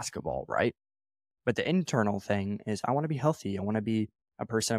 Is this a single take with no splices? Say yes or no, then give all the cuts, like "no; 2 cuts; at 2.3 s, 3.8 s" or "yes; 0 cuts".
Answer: yes; 0 cuts